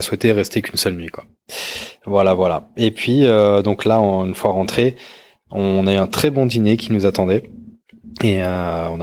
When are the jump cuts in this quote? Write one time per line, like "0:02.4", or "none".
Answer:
none